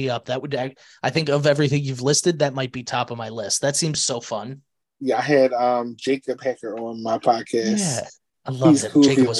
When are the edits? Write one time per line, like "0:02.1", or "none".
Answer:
none